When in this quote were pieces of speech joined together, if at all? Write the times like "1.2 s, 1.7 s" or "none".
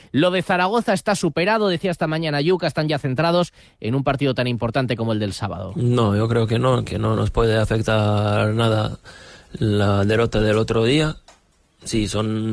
none